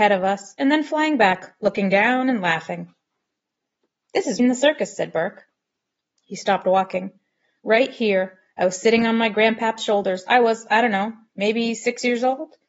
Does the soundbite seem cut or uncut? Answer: cut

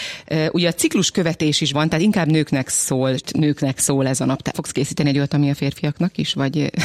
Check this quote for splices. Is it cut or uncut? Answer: cut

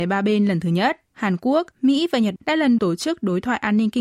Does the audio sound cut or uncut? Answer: cut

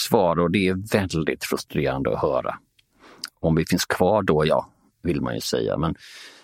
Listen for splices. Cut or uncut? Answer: uncut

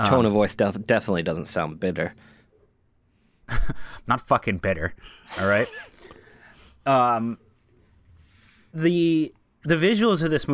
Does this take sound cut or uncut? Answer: uncut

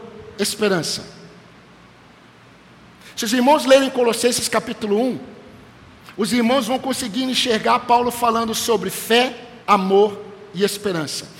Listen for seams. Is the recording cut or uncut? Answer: cut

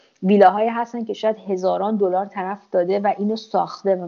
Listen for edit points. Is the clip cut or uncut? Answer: uncut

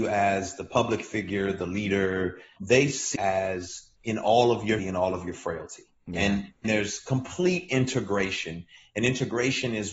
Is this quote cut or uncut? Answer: cut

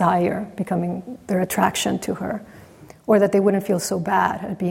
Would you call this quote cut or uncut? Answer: uncut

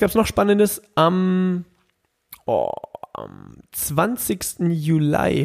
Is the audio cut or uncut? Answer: uncut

